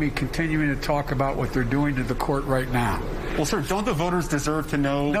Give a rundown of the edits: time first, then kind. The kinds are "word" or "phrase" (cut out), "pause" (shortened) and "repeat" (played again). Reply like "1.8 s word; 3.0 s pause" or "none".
none